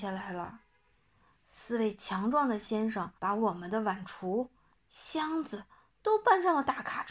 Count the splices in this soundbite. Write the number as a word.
two